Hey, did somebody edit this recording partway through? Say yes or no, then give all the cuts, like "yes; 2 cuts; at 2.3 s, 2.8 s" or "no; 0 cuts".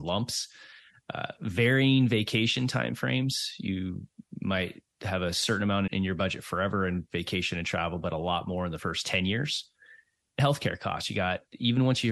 yes; 2 cuts; at 5.9 s, 10.4 s